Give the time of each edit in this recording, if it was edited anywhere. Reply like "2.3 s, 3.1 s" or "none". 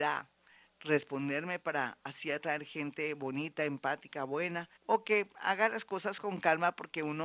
4.8 s, 5.3 s

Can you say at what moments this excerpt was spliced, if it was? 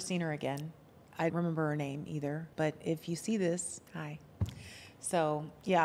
1.3 s, 2.5 s, 3.9 s

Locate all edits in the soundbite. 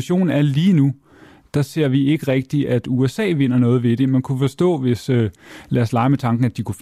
none

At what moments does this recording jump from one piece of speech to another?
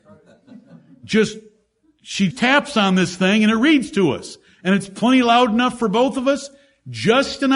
2.3 s

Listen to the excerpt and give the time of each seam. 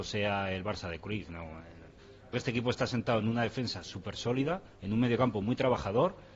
2.3 s

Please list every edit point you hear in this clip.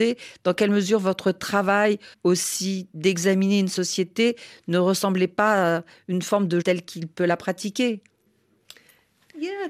2.1 s, 6.6 s

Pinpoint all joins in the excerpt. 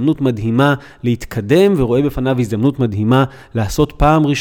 none

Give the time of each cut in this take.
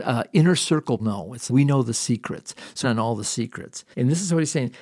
1.0 s, 1.5 s, 2.8 s, 3.9 s

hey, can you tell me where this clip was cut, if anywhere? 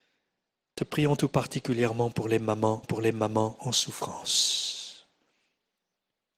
2.8 s

